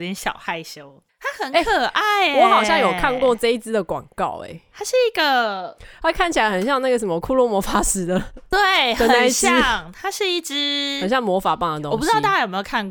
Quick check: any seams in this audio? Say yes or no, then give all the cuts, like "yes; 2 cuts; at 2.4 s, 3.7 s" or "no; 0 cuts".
yes; 1 cut; at 1.1 s